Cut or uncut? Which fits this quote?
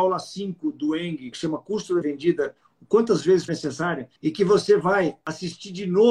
cut